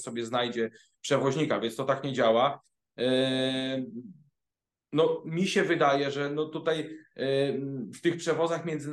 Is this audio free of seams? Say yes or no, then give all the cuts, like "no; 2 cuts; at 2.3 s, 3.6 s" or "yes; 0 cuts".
yes; 0 cuts